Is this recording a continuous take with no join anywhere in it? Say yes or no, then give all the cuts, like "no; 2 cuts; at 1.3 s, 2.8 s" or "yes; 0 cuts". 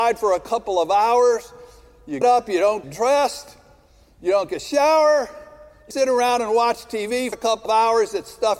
no; 6 cuts; at 2.2 s, 2.8 s, 4.5 s, 5.9 s, 7.3 s, 7.7 s